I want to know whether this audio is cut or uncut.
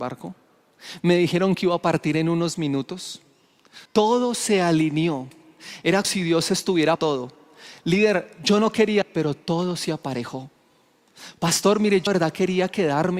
cut